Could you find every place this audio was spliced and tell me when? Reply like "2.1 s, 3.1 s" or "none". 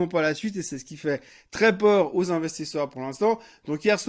none